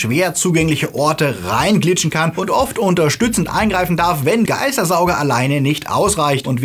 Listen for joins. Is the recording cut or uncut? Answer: cut